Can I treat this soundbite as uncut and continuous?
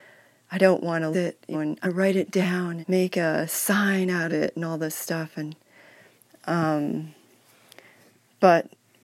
no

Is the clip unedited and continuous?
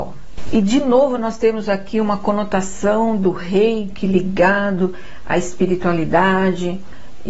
yes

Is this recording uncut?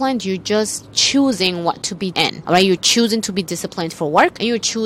no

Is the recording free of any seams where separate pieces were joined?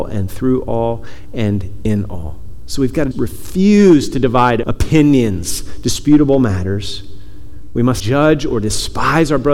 no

